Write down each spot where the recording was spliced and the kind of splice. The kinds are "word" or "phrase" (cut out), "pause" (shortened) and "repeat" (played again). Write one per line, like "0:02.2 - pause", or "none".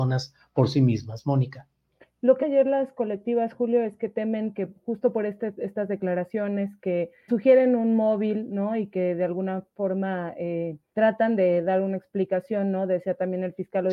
0:02.4 - word
0:07.3 - word
0:10.9 - word